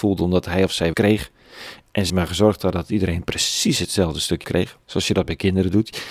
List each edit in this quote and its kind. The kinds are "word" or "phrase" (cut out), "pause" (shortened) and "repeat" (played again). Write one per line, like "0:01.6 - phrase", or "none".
0:00.9 - phrase
0:02.1 - word
0:04.4 - word
0:04.8 - pause